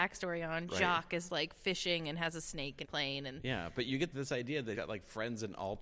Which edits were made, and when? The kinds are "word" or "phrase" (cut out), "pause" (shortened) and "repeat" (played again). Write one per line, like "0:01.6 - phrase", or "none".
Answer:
0:01.3 - word
0:02.8 - word
0:04.1 - word
0:04.7 - word

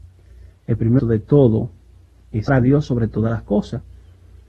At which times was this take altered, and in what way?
0:01.0 - word
0:02.5 - word

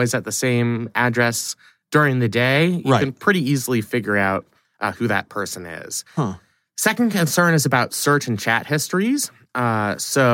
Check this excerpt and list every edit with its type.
none

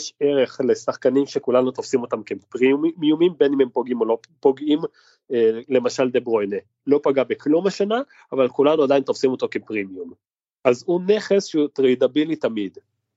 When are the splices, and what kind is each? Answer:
none

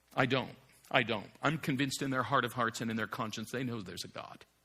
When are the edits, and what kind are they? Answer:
none

